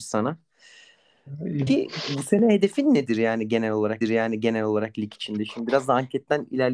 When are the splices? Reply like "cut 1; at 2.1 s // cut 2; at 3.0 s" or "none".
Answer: cut 1; at 1.7 s // cut 2; at 4.0 s